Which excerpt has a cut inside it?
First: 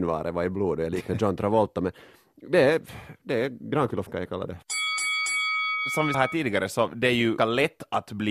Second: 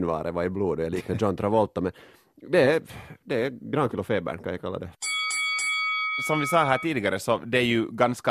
first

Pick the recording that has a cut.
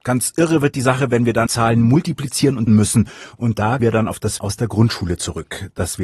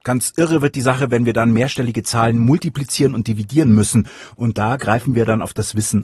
first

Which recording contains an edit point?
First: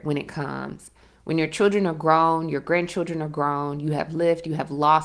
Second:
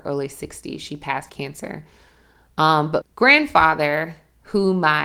second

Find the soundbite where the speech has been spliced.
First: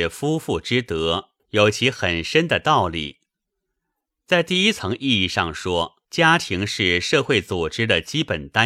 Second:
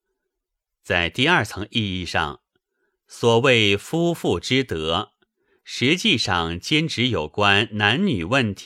first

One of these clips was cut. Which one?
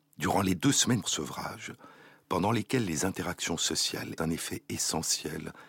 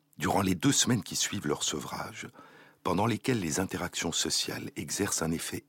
first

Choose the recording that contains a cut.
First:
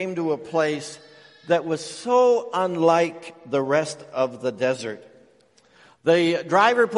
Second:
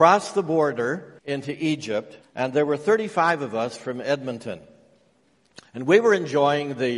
second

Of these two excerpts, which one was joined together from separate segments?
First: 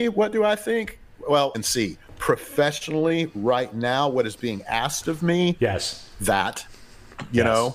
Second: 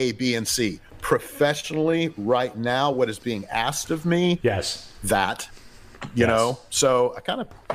first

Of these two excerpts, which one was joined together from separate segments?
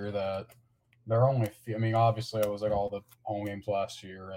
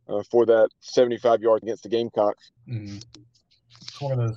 second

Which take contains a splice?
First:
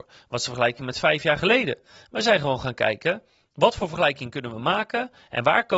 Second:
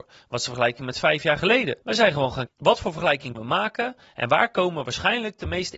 second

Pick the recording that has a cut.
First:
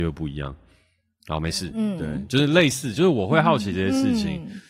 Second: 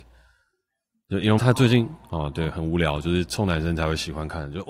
second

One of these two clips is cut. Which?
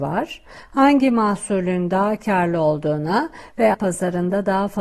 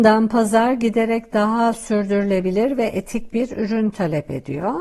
first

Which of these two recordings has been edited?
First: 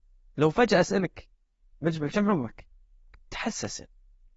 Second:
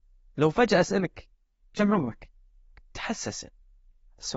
second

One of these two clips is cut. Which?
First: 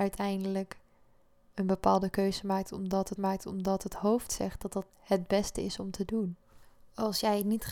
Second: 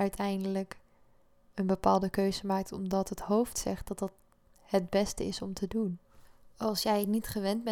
first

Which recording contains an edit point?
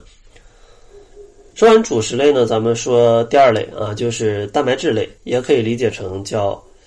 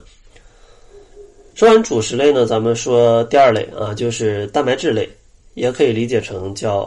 first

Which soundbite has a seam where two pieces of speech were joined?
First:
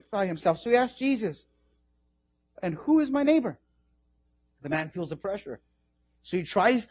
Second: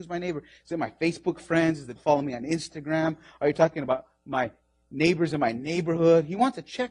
second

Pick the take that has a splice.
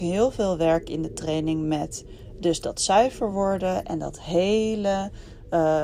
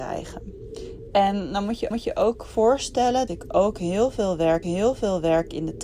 second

